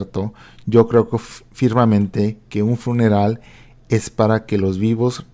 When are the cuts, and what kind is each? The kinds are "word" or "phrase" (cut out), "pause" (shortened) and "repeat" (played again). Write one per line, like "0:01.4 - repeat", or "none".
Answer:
none